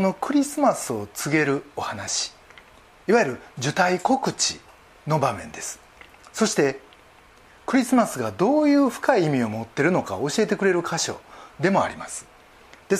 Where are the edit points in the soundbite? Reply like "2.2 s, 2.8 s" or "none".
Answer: none